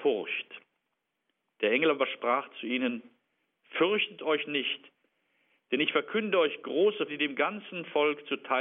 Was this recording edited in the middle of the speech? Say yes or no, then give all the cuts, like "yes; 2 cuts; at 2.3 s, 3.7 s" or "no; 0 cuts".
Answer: yes; 1 cut; at 7.1 s